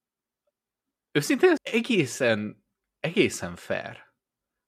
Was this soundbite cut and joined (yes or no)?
yes